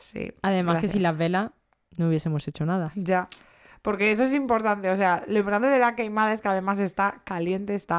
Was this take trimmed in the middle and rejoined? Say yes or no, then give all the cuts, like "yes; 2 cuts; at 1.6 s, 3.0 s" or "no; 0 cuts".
no; 0 cuts